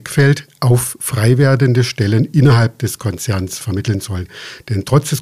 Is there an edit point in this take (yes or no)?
no